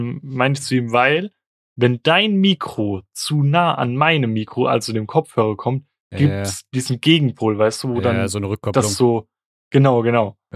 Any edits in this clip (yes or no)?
no